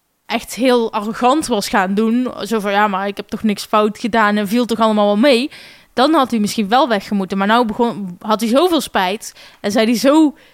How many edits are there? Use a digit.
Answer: 0